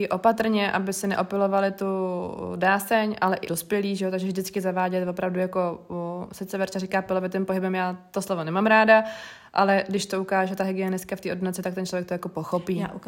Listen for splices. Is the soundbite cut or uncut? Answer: cut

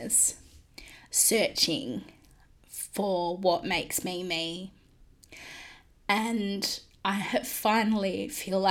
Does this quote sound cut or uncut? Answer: uncut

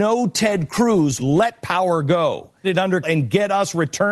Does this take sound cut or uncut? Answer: cut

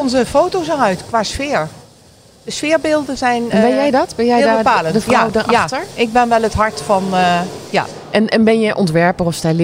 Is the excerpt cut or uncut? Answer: uncut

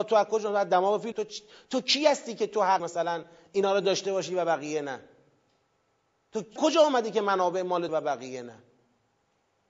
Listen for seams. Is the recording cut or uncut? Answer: cut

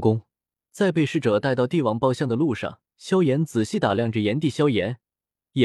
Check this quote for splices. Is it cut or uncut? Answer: cut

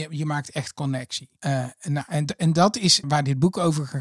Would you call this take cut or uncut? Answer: cut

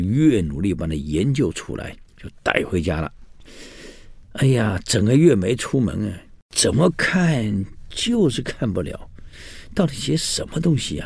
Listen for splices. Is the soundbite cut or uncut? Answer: cut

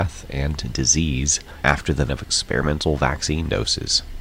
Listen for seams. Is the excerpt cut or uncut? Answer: cut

